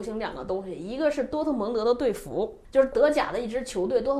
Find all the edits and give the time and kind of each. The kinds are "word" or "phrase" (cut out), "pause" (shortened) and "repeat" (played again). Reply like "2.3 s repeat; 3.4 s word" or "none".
2.6 s pause